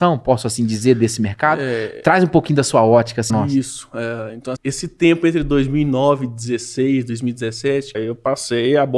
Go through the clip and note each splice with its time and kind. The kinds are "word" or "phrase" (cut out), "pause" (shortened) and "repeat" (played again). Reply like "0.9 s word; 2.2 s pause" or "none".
3.3 s word; 4.6 s word; 7.9 s word